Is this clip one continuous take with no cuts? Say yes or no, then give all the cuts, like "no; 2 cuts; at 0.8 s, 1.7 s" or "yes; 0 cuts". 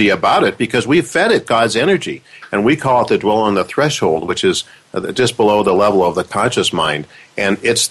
yes; 0 cuts